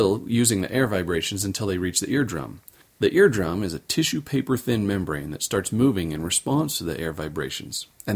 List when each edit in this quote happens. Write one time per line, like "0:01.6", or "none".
0:02.8